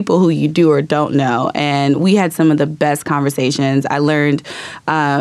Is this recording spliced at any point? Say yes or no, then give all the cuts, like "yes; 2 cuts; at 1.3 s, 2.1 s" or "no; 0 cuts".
no; 0 cuts